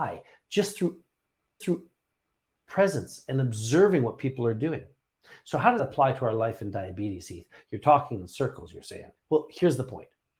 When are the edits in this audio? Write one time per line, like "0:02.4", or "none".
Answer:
0:01.6
0:05.8
0:09.2